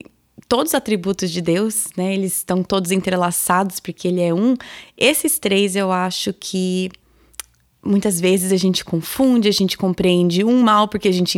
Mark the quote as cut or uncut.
uncut